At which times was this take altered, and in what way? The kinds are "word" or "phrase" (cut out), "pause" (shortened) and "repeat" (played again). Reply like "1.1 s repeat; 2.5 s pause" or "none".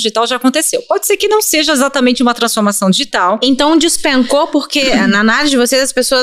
none